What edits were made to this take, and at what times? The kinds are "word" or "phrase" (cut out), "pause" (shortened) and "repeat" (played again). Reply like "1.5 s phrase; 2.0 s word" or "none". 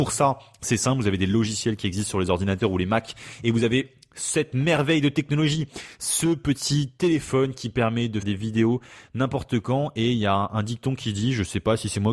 8.2 s word

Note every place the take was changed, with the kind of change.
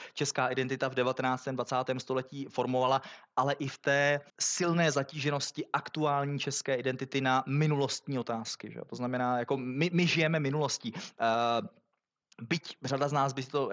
4.3 s pause

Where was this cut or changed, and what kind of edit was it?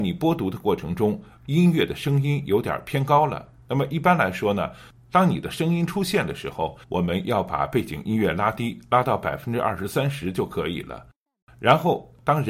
6.8 s pause

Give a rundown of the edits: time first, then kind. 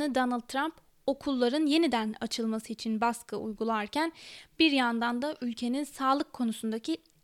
none

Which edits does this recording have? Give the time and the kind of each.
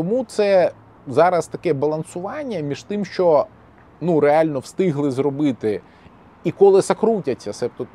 none

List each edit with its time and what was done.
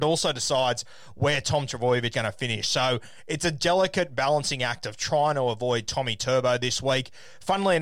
2.1 s word

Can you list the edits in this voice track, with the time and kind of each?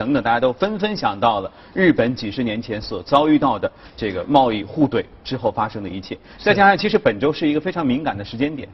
none

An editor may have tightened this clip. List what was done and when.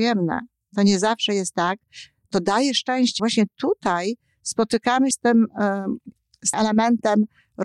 3.2 s word; 5.1 s word; 6.5 s word

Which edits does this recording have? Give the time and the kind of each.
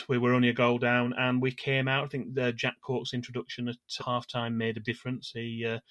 4.0 s phrase; 4.8 s word

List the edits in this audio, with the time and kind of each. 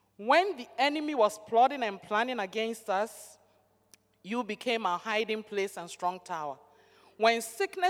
none

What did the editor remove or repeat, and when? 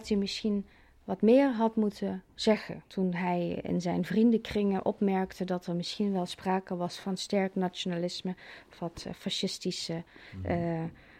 2.9 s pause

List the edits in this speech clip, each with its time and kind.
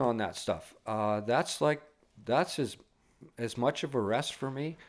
none

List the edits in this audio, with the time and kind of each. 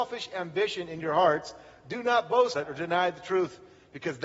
2.5 s word

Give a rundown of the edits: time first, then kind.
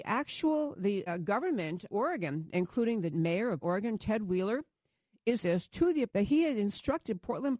1.1 s word; 1.9 s word; 3.1 s word; 3.6 s word; 5.4 s word; 6.1 s word

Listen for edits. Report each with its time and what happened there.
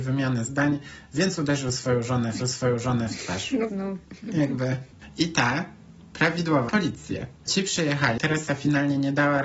2.4 s repeat; 3.7 s word; 6.7 s phrase; 8.2 s phrase

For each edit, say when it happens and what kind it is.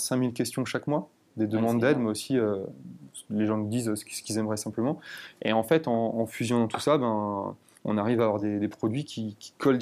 none

